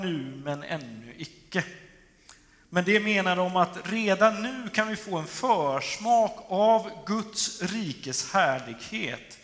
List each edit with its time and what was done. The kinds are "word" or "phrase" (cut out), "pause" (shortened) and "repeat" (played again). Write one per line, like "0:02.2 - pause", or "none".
none